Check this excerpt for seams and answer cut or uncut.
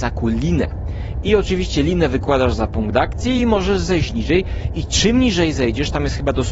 uncut